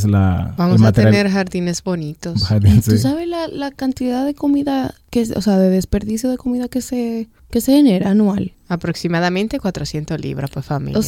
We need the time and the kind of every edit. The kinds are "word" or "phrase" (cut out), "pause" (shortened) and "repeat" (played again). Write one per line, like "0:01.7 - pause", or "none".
none

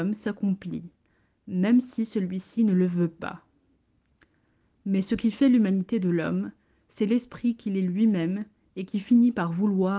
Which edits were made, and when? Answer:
none

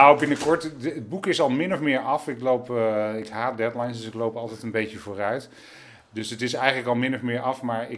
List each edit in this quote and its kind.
none

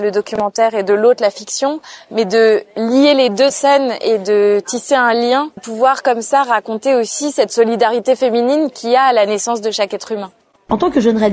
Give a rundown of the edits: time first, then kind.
0:03.5 - phrase
0:05.6 - phrase

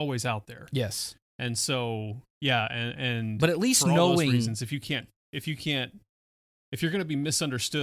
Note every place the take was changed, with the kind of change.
none

